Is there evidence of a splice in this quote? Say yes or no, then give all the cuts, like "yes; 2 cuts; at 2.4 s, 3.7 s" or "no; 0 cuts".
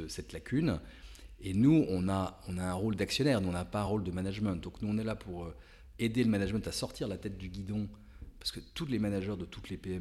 no; 0 cuts